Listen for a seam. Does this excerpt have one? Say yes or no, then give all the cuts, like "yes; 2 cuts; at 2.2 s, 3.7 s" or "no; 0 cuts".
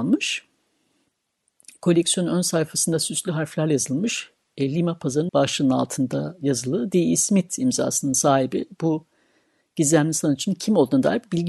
yes; 1 cut; at 5.3 s